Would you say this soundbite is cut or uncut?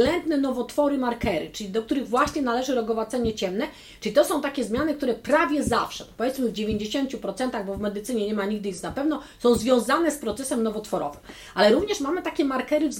uncut